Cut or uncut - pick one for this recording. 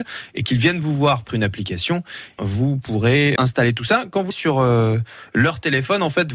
cut